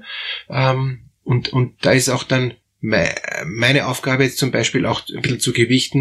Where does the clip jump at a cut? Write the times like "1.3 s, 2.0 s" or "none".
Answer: none